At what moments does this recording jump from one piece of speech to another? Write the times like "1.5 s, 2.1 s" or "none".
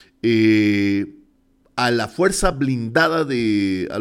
none